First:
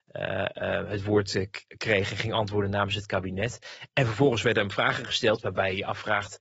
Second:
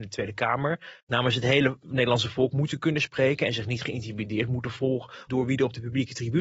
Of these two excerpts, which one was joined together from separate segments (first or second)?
second